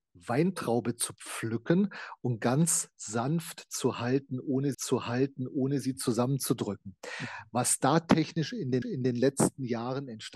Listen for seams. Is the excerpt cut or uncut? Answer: cut